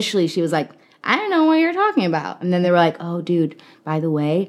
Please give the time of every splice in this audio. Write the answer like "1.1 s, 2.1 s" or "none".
none